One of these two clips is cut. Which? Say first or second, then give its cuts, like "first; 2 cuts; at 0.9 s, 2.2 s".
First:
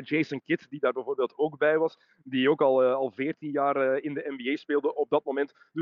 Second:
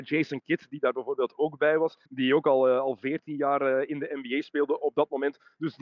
second; 1 cut; at 2.1 s